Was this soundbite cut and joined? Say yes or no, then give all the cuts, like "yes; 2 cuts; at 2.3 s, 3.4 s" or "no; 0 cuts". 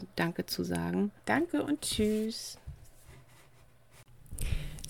yes; 1 cut; at 1.2 s